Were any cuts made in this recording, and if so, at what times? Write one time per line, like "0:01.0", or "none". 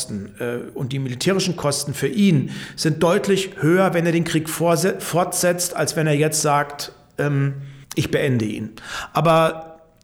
0:07.8